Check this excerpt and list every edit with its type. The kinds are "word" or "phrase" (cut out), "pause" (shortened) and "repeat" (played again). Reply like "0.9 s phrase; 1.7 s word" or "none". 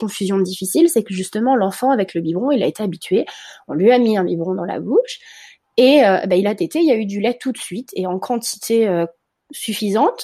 none